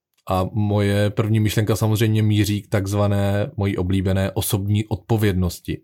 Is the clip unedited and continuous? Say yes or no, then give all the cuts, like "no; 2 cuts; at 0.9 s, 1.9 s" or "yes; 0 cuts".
yes; 0 cuts